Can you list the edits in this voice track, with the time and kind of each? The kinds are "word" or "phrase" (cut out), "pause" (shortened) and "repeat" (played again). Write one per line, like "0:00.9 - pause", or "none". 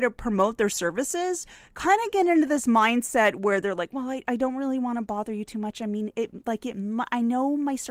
none